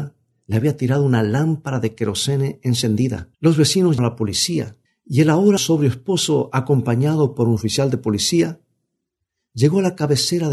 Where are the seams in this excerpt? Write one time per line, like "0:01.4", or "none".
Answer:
0:03.3
0:04.0
0:04.9
0:05.6